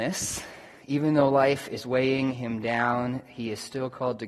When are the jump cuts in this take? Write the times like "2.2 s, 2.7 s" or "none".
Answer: none

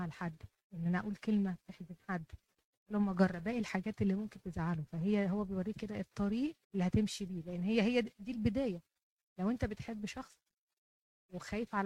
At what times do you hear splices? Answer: 6.6 s

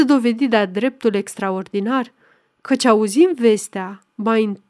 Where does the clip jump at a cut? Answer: none

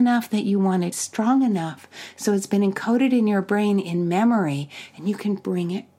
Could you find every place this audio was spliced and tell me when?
0.9 s

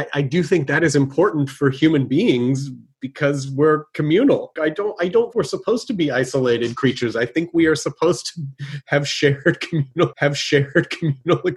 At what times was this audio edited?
4.6 s, 5.3 s, 10.1 s

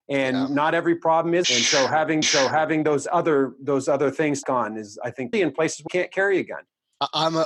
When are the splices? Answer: 1.4 s, 2.2 s, 4.4 s, 5.3 s, 5.9 s

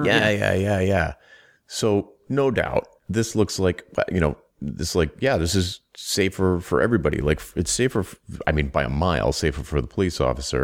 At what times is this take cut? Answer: none

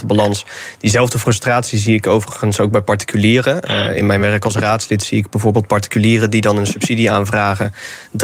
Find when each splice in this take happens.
none

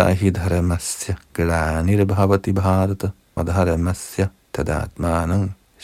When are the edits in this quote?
3.4 s

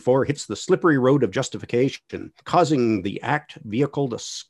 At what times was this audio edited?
2.4 s

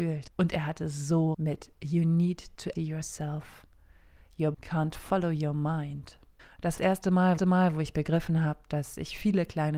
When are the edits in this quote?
1.3 s, 2.8 s, 4.5 s, 6.4 s, 6.8 s, 7.4 s

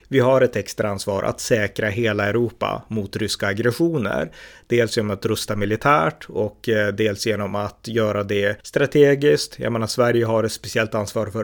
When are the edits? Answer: 8.6 s

